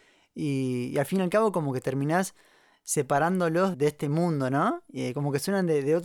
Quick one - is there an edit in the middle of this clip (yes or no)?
yes